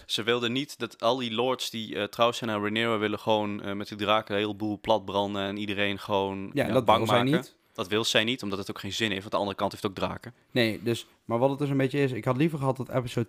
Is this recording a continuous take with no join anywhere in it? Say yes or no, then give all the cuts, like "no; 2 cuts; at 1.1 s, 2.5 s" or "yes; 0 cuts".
no; 1 cut; at 6.5 s